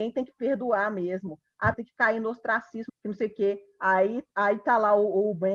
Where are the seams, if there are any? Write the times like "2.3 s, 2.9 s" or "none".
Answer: 1.7 s, 2.9 s, 4.3 s